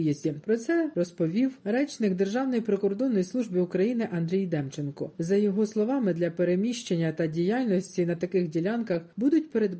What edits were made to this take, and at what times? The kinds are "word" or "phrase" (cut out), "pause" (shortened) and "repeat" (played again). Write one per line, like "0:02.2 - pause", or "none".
none